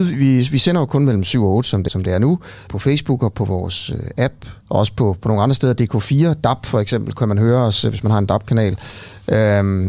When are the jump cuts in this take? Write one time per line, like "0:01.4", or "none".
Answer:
0:01.9
0:02.7
0:04.6